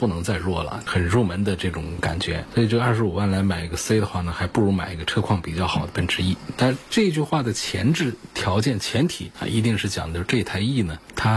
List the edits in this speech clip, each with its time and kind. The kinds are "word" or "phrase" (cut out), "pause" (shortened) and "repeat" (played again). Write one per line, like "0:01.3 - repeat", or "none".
none